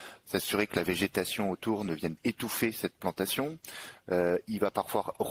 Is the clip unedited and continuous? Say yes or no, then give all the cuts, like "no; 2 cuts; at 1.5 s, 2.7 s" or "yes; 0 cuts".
no; 1 cut; at 2.2 s